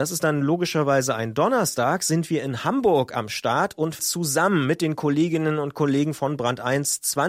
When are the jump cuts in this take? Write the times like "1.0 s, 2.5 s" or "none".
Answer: 4.0 s